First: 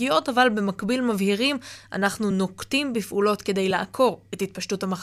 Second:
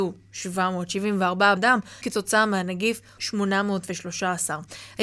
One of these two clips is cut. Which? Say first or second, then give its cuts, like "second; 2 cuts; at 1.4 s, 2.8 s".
second; 3 cuts; at 1.6 s, 2.0 s, 3.2 s